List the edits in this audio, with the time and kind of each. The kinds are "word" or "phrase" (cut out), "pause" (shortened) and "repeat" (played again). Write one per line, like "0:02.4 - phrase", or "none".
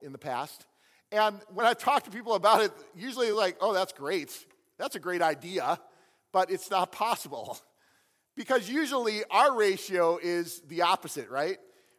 none